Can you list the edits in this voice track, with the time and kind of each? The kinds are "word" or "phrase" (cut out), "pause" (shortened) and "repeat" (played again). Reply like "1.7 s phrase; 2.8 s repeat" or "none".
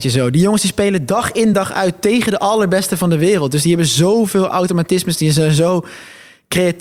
none